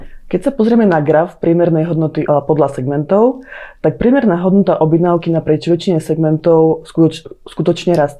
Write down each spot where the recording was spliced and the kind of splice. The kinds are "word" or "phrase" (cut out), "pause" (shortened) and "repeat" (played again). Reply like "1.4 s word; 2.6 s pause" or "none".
2.3 s word